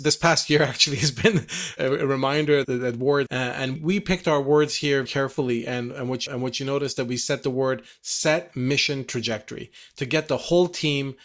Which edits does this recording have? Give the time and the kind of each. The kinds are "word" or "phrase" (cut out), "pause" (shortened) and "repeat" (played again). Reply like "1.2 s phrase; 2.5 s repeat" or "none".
1.8 s word; 2.6 s word; 3.3 s word; 3.8 s word; 5.1 s word; 6.3 s repeat